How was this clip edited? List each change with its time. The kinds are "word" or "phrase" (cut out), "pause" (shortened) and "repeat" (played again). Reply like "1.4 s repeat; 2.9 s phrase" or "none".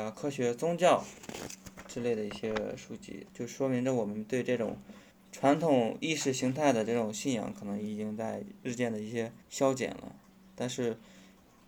3.3 s pause; 5.1 s pause; 8.6 s pause; 9.4 s pause